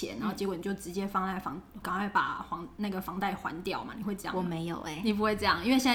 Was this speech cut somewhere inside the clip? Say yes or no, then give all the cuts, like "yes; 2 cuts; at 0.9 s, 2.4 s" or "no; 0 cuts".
yes; 1 cut; at 1.8 s